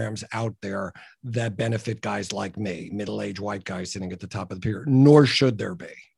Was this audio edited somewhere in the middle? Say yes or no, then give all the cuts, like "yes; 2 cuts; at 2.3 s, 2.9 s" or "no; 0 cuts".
no; 0 cuts